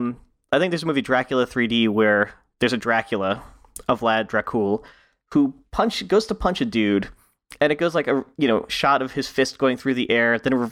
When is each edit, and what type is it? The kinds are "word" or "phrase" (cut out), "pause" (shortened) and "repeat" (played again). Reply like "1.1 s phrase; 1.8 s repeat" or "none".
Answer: none